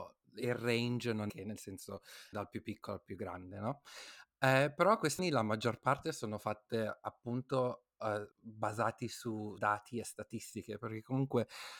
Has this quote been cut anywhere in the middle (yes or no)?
yes